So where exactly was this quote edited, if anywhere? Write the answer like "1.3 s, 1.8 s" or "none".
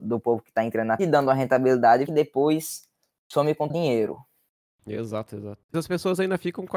1.0 s, 2.1 s, 3.7 s, 5.7 s